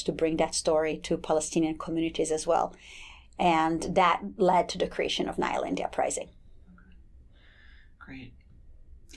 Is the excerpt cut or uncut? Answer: uncut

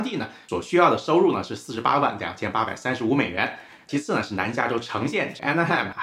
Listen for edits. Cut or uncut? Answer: uncut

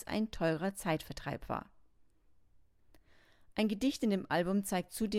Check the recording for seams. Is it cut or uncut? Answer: uncut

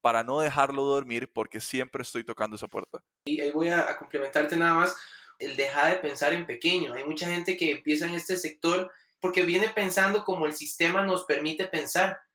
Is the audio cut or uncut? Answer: uncut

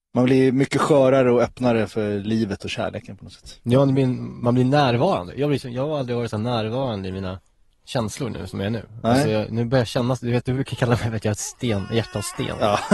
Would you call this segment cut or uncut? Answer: uncut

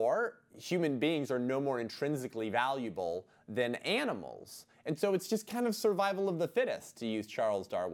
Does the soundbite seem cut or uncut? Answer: uncut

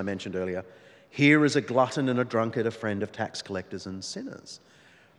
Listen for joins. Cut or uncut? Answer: uncut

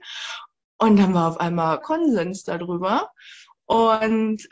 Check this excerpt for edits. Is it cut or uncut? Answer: cut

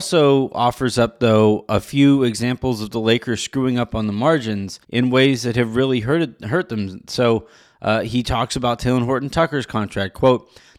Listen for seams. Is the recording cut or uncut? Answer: cut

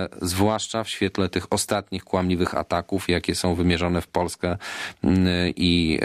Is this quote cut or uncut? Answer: uncut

